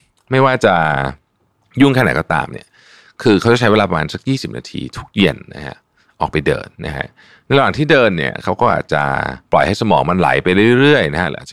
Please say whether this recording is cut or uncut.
cut